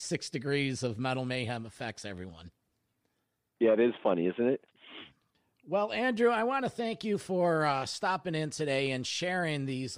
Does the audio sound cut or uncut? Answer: uncut